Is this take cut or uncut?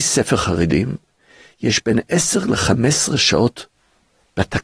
uncut